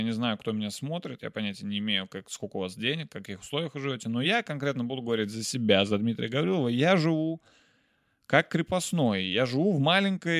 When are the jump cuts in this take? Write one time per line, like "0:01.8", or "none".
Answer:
none